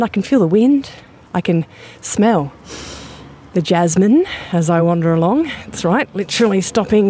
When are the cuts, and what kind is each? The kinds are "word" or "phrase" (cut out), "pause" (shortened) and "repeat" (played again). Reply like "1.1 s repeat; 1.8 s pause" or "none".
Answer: none